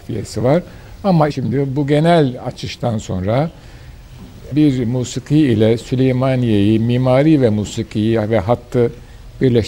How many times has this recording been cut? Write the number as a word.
two